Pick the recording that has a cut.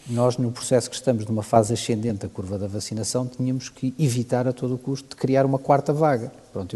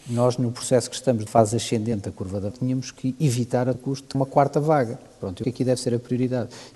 second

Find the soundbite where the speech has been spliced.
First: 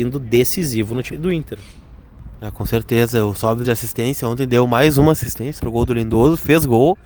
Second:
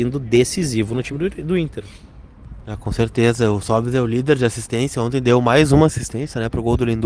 first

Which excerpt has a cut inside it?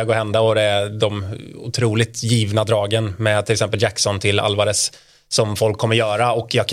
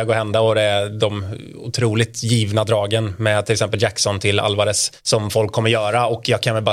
second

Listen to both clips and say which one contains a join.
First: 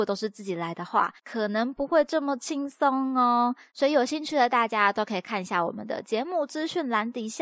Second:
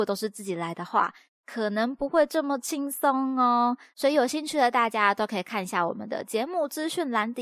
first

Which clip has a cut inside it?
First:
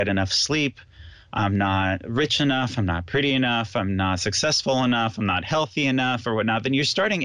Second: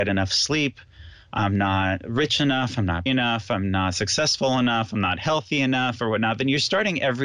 second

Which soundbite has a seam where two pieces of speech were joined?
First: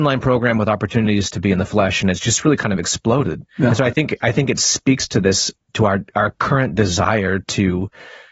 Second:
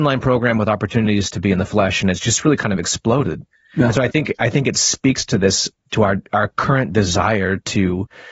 first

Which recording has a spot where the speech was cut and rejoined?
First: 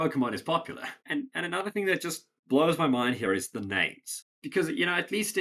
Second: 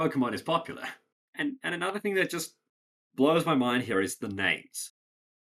first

